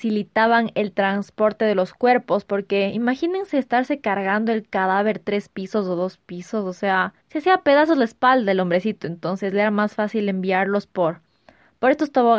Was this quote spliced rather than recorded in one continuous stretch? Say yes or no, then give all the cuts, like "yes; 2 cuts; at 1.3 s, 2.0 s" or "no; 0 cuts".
yes; 1 cut; at 7.2 s